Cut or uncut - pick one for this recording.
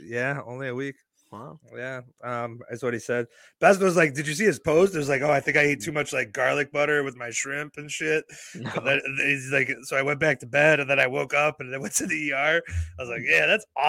uncut